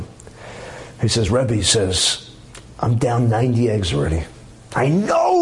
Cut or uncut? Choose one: uncut